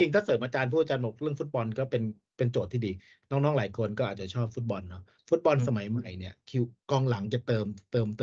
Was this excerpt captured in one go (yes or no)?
yes